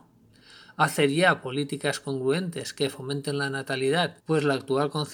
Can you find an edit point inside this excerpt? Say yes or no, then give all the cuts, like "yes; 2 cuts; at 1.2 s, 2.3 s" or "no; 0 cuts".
yes; 1 cut; at 4.2 s